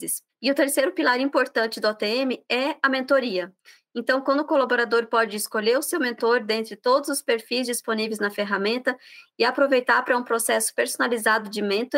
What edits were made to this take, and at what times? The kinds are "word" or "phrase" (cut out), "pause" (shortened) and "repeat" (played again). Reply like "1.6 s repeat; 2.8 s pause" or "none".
none